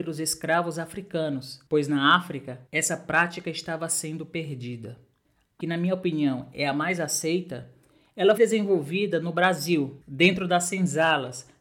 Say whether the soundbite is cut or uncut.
cut